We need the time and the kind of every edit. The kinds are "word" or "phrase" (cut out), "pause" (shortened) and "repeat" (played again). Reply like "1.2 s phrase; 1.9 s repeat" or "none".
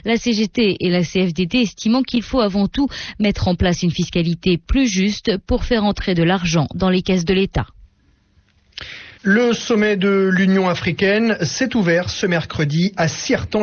9.2 s pause